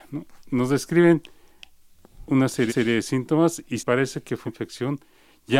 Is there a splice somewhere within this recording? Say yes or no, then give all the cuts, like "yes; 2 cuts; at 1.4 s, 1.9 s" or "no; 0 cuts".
yes; 3 cuts; at 2.7 s, 3.8 s, 4.5 s